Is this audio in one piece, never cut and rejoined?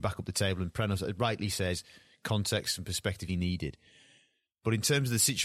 no; 1 cut; at 3.3 s

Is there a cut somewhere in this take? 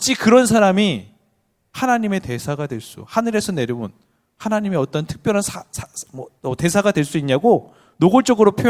no; 0 cuts

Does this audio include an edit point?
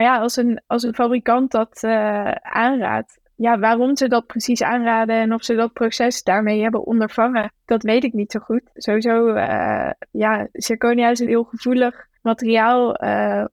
yes; 3 cuts; at 10.1 s, 11.3 s, 12.2 s

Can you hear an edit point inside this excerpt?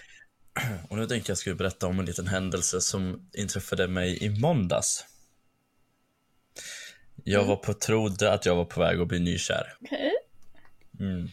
yes; 1 cut; at 9.8 s

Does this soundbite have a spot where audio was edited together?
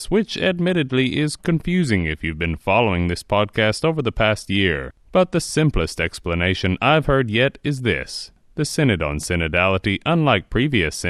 yes; 1 cut; at 1.4 s

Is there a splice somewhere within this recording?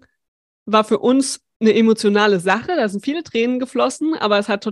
no; 0 cuts

